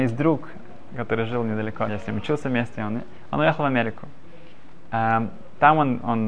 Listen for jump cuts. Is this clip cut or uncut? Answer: cut